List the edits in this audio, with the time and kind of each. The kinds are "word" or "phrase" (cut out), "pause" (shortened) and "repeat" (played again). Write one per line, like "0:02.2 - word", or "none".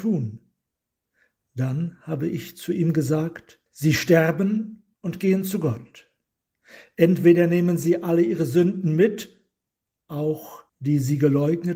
0:03.7 - pause
0:04.9 - pause
0:10.7 - pause

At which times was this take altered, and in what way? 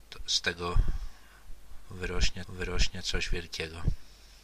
0:02.4 - repeat

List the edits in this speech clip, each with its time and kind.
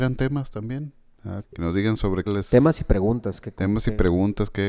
0:01.4 - word
0:02.3 - word

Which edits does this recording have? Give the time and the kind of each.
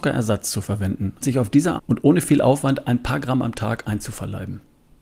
0:01.2 - word
0:01.8 - word

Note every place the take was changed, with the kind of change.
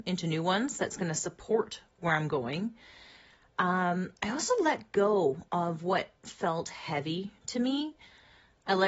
0:04.2 - pause
0:05.5 - pause

